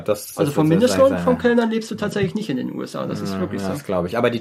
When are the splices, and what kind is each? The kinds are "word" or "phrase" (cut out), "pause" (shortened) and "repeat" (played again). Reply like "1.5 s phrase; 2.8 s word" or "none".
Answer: none